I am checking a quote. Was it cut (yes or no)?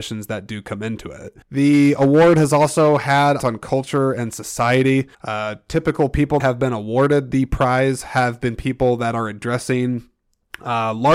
yes